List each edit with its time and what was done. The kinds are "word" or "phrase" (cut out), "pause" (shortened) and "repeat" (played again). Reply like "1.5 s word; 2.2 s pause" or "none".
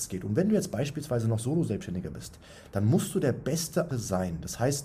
3.9 s word

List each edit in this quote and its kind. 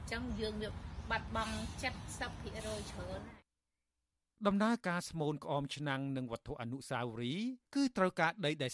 7.6 s pause

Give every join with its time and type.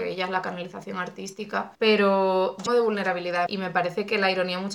1.8 s pause; 2.7 s phrase; 3.5 s word

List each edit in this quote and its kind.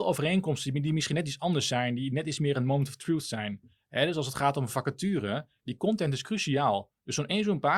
none

